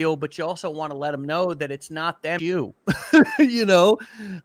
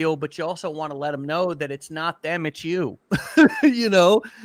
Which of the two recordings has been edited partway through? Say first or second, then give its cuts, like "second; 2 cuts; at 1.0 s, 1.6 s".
first; 1 cut; at 2.4 s